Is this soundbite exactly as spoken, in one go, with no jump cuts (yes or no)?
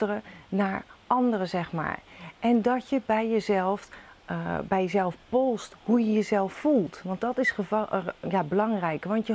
yes